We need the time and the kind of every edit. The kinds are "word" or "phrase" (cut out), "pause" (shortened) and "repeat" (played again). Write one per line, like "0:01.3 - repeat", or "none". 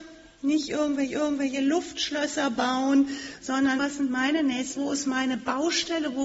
0:01.1 - repeat
0:03.8 - word
0:04.8 - word